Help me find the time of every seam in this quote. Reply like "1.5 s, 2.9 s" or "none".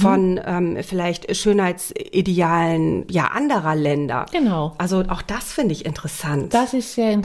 3.1 s